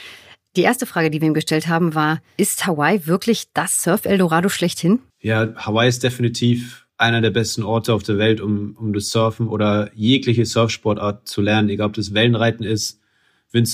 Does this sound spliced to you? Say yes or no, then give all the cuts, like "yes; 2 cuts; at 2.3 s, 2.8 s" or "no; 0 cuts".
yes; 2 cuts; at 5.1 s, 6.9 s